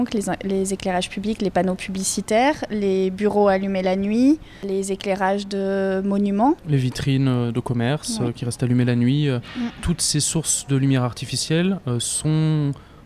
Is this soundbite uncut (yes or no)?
yes